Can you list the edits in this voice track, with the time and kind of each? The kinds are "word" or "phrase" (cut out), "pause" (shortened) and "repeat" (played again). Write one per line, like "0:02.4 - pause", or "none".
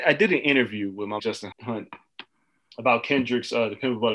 0:01.2 - word
0:01.5 - word

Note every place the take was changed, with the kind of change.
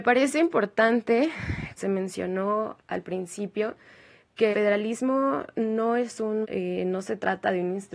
0:01.8 - word
0:02.8 - word
0:04.5 - word
0:06.4 - word

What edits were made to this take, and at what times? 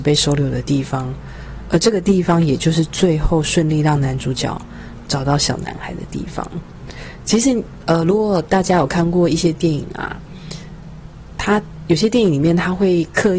none

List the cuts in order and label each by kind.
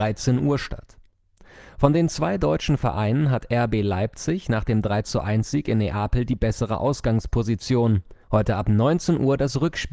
0:08.2 - pause

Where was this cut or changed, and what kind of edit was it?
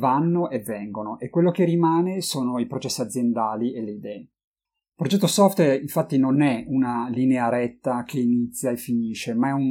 none

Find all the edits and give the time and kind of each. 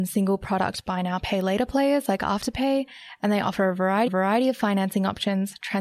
0:04.1 - repeat

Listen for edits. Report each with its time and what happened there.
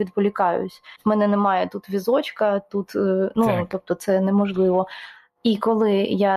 0:01.0 - pause

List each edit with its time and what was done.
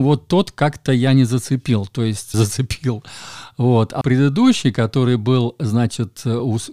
0:02.3 - phrase
0:04.0 - word

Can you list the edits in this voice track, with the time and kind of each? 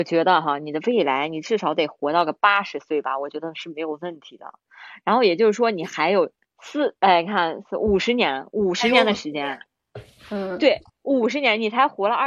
0:06.5 - pause

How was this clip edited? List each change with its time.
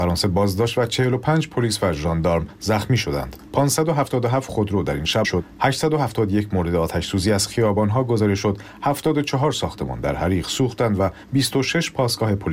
0:05.2 - phrase

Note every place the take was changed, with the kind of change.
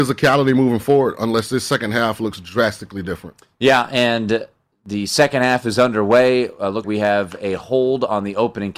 0:06.8 - word

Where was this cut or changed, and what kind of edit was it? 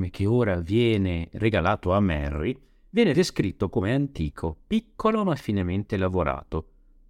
none

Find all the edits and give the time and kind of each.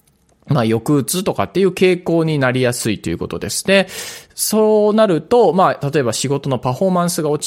none

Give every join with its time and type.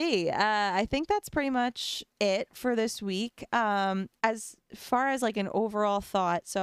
0:02.1 - pause
0:04.2 - pause

